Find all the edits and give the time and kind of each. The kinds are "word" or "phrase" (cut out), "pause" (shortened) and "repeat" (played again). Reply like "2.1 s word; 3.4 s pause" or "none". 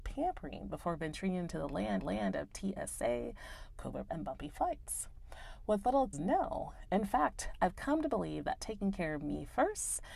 2.0 s repeat; 4.1 s word; 6.1 s phrase